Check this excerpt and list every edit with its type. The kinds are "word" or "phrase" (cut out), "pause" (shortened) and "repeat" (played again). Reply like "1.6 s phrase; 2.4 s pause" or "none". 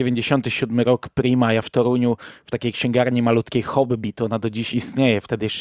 1.6 s phrase